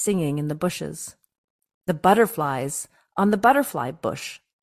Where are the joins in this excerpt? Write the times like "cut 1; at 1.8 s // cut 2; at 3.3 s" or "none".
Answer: none